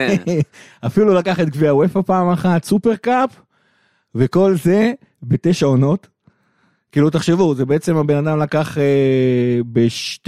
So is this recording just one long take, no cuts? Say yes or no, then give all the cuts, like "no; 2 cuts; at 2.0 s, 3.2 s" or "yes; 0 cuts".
yes; 0 cuts